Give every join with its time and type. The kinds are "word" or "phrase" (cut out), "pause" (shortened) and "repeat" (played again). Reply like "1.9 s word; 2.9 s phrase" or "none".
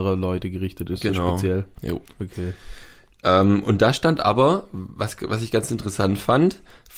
2.1 s pause